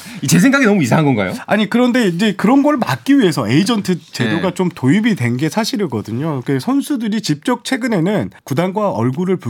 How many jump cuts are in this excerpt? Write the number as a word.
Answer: one